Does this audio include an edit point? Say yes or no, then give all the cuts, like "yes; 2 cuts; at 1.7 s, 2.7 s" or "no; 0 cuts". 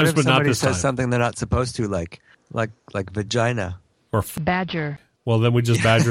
no; 0 cuts